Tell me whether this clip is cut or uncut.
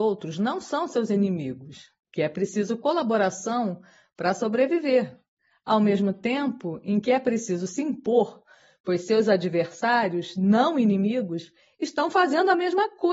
uncut